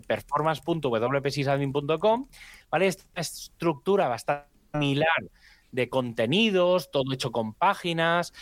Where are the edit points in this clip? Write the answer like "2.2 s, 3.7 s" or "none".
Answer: none